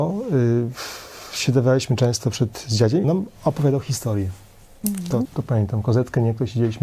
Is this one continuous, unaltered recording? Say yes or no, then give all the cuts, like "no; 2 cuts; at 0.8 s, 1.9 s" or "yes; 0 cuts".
no; 2 cuts; at 3.0 s, 5.2 s